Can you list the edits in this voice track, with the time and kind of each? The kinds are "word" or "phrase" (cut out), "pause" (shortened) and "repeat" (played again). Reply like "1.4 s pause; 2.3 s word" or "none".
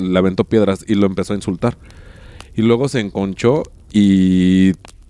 none